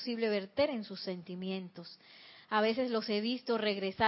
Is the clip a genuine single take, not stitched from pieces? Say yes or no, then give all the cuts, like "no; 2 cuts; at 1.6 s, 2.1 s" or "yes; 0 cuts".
yes; 0 cuts